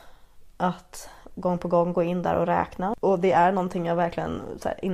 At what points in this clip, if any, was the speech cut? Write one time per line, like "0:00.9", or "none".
none